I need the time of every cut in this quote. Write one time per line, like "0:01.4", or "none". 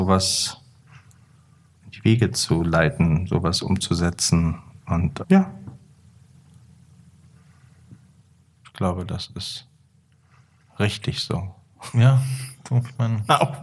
0:05.2